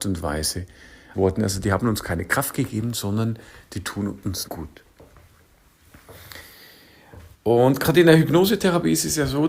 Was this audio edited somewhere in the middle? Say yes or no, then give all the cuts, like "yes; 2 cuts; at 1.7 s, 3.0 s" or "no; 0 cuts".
yes; 3 cuts; at 1.1 s, 4.4 s, 7.3 s